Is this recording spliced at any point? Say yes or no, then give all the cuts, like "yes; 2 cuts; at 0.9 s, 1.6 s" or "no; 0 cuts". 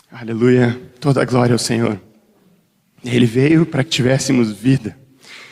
no; 0 cuts